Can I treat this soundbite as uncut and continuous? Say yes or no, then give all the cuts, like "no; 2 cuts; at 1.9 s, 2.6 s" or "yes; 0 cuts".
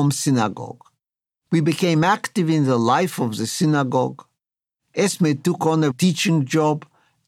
no; 1 cut; at 5.9 s